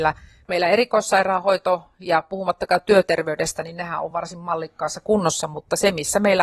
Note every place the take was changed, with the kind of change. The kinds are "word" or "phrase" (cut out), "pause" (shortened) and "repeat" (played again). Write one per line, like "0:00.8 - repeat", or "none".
none

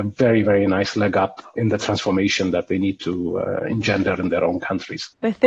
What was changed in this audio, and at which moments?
0:01.6 - word

